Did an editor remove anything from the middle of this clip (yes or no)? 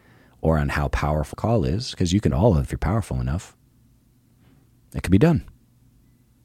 yes